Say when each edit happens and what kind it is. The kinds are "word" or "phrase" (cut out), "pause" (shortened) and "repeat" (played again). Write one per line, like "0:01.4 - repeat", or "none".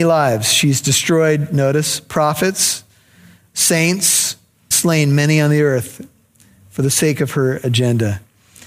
0:04.7 - word